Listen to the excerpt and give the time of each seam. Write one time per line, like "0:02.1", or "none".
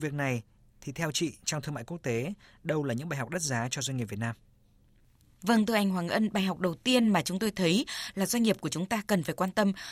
none